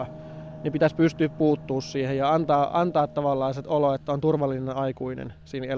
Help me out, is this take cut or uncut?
uncut